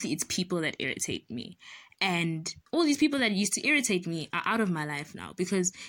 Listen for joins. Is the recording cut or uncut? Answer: cut